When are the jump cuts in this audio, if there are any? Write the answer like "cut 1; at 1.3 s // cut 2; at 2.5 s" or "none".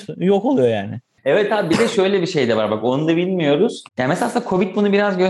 cut 1; at 3.9 s